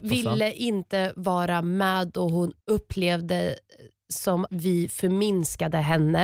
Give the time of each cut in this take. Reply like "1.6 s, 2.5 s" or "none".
2.6 s, 4.5 s

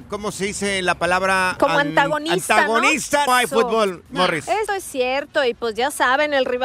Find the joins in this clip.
3.3 s, 4.7 s

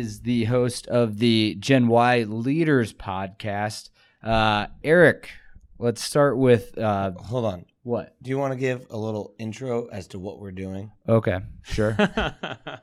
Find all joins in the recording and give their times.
none

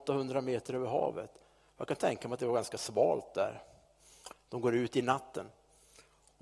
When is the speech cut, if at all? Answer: none

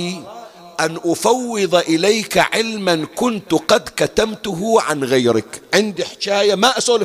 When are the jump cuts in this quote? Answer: none

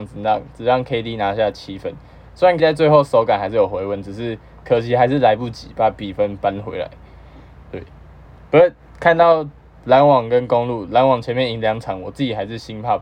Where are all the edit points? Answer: 2.6 s, 8.2 s

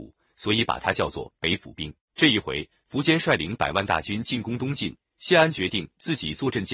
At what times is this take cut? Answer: 2.0 s

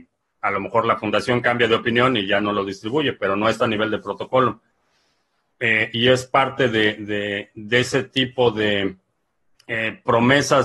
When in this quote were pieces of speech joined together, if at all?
none

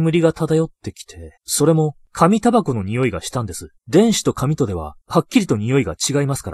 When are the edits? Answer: 1.4 s, 2.0 s, 3.8 s, 5.0 s

